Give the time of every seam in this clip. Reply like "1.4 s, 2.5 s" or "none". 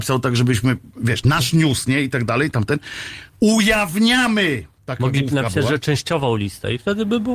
3.3 s